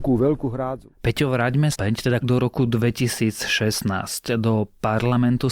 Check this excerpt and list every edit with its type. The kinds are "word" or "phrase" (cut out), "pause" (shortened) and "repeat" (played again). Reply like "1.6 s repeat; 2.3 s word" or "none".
1.7 s phrase; 2.2 s word